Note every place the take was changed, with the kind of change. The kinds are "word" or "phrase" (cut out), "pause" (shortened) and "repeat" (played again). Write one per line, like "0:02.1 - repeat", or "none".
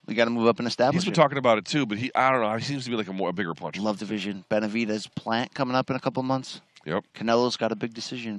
0:04.0 - word
0:07.1 - pause